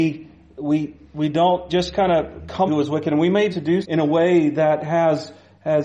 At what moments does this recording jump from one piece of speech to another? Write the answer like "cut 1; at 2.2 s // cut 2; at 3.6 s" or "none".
cut 1; at 1.7 s // cut 2; at 2.7 s // cut 3; at 3.5 s // cut 4; at 3.8 s